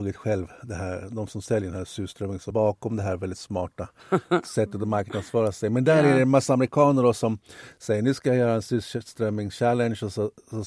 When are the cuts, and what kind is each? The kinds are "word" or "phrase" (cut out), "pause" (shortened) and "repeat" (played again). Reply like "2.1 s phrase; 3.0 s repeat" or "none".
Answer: 2.5 s word